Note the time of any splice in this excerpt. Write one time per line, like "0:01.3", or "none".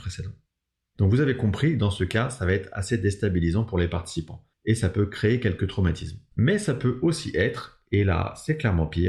0:04.5
0:06.3